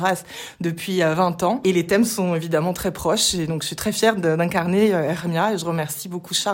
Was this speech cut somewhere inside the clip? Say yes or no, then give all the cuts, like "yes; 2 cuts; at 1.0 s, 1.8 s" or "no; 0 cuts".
no; 0 cuts